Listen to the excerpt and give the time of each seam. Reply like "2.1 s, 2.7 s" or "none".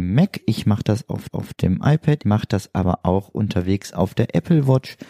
1.3 s, 2.2 s